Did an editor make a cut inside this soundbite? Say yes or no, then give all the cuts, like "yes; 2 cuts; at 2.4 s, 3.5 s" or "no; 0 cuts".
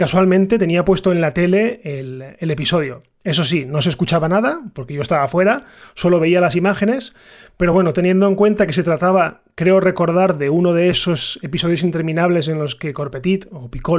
no; 0 cuts